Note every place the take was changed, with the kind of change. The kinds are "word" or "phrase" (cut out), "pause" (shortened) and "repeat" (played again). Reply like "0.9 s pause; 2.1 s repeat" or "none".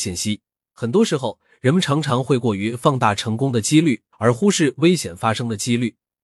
4.1 s pause